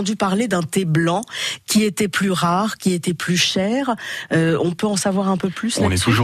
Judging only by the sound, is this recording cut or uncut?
uncut